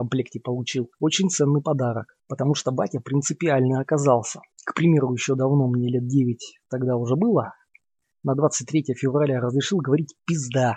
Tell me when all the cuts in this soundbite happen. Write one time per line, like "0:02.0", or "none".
0:00.9
0:04.5